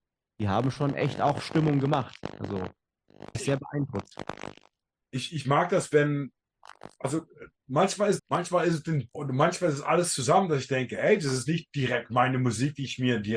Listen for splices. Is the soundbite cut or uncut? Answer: cut